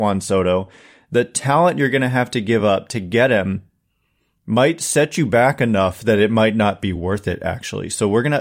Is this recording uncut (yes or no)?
yes